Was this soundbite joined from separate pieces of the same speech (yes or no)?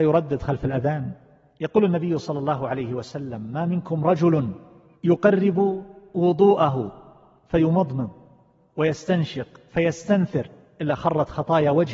no